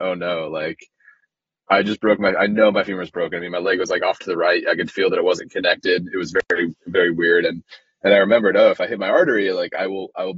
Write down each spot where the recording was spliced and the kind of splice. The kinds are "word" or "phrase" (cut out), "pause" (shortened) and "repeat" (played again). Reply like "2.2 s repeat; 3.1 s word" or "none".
none

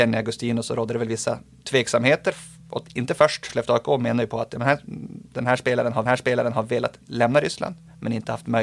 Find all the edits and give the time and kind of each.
2.6 s pause; 3.5 s word; 6.1 s repeat

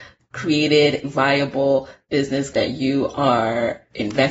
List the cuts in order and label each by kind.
1.0 s word; 2.5 s word

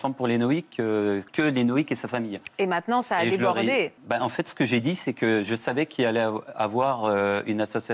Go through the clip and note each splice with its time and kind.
1.3 s word; 4.0 s pause

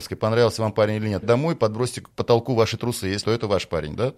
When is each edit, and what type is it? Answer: 1.2 s word; 2.1 s pause; 3.2 s phrase

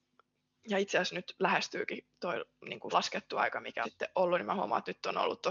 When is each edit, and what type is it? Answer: 2.9 s word; 3.8 s word

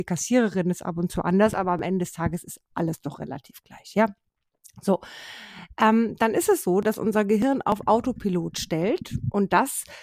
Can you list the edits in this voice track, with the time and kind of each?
none

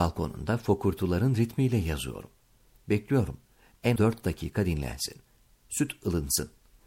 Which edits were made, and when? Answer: 4.0 s word

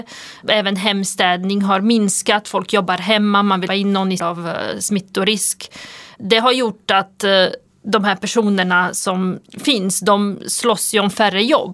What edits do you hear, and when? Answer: 3.7 s phrase; 4.2 s phrase

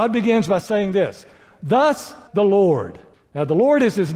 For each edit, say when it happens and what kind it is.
2.3 s word; 3.1 s pause

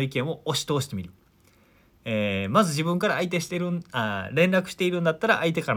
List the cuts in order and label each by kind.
none

